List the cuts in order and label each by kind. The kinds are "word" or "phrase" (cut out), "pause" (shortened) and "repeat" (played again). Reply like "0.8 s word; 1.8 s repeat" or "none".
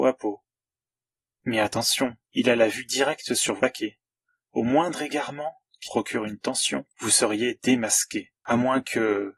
2.2 s pause; 3.6 s word; 4.2 s pause; 5.8 s word; 6.9 s pause; 8.4 s pause